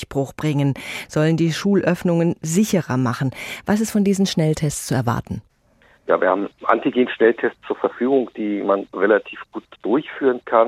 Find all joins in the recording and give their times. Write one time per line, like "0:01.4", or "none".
none